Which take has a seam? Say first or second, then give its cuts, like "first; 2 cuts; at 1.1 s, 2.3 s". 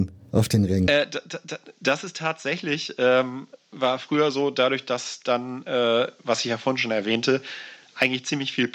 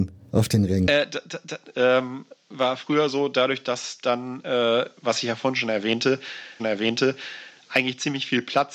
second; 2 cuts; at 1.7 s, 6.6 s